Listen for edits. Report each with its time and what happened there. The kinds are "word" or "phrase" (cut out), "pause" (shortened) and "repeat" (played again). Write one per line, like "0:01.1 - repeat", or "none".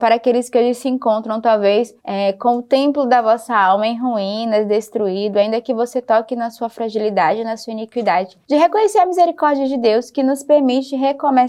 0:02.0 - pause
0:08.4 - pause